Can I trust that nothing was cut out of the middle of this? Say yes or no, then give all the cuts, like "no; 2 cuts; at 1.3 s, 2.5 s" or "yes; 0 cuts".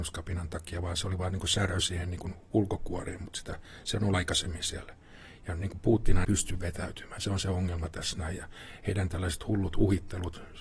no; 2 cuts; at 4.1 s, 6.2 s